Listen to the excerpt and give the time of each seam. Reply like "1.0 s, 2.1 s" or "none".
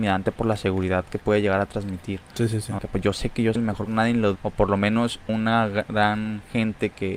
2.8 s, 3.5 s, 3.9 s, 4.3 s, 5.3 s